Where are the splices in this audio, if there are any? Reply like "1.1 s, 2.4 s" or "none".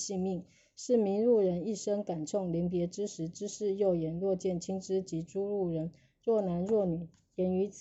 none